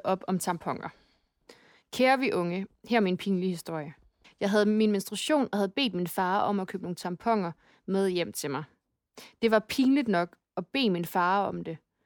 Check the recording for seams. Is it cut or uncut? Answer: uncut